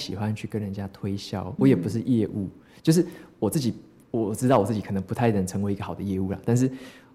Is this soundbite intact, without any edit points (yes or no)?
no